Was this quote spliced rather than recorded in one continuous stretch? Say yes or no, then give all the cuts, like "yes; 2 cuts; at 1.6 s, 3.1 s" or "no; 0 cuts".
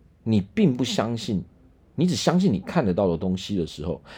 yes; 1 cut; at 1.9 s